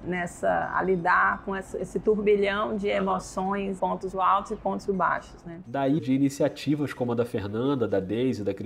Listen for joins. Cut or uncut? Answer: cut